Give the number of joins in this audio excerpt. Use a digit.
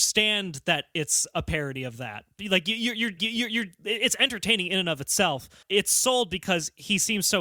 2